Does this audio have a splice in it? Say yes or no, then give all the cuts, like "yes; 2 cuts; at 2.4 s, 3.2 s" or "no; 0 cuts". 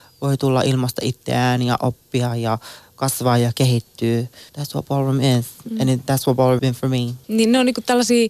yes; 3 cuts; at 4.5 s, 6.6 s, 7.2 s